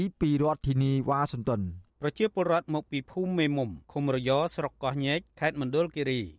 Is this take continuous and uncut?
no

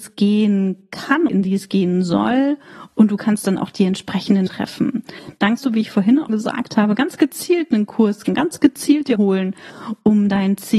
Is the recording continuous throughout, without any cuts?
no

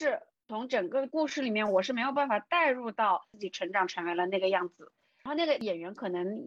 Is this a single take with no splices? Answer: yes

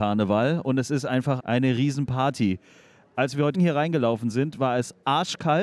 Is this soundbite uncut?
no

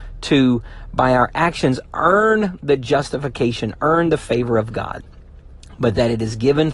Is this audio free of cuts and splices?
yes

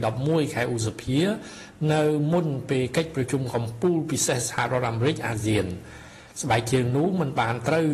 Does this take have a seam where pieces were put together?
no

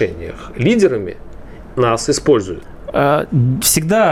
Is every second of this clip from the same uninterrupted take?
no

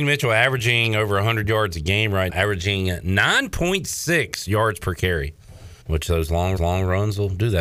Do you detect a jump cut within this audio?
yes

